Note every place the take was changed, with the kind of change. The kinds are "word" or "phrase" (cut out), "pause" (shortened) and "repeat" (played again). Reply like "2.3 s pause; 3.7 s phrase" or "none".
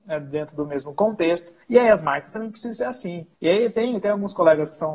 1.6 s pause; 3.3 s pause